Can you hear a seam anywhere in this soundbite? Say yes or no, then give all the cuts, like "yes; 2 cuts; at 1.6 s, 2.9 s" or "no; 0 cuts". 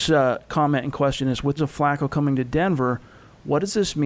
yes; 1 cut; at 1.6 s